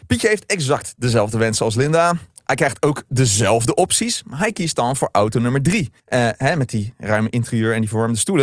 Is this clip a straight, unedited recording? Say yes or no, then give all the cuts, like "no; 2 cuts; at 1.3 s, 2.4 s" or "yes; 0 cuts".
no; 1 cut; at 6.0 s